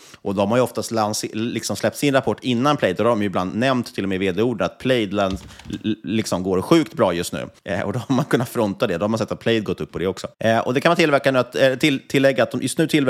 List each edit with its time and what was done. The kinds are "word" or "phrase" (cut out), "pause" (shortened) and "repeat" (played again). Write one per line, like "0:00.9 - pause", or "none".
0:07.6 - pause
0:10.3 - pause